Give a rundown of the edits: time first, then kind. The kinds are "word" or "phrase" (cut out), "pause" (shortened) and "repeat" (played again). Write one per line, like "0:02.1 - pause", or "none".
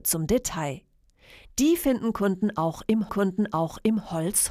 0:03.1 - repeat